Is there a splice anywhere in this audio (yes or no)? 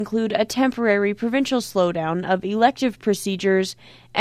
no